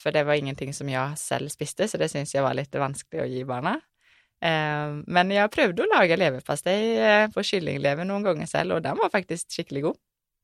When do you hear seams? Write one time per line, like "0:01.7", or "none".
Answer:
none